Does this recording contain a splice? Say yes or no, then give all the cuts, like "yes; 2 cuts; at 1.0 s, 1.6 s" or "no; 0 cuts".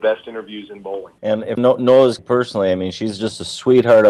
yes; 3 cuts; at 1.2 s, 1.6 s, 2.2 s